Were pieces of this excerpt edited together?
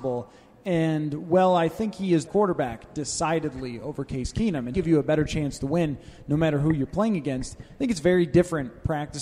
yes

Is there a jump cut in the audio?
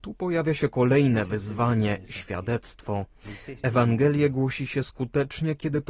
no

